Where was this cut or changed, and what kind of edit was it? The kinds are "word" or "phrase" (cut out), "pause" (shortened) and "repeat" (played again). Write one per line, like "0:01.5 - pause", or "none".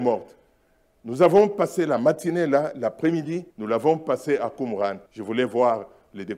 0:03.5 - pause
0:05.1 - pause